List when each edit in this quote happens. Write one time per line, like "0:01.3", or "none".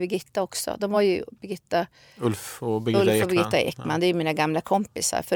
none